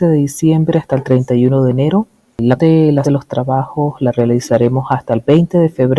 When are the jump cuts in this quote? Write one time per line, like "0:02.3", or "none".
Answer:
0:02.6
0:03.0